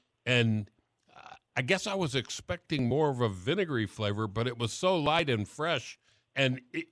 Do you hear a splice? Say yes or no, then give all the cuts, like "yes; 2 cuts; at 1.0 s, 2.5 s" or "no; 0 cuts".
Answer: no; 0 cuts